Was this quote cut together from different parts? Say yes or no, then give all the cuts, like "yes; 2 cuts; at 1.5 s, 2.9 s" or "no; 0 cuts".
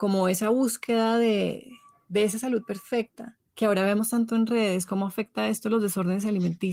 no; 0 cuts